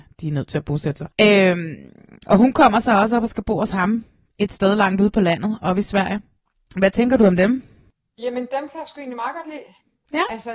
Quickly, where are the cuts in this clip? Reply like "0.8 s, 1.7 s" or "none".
1.1 s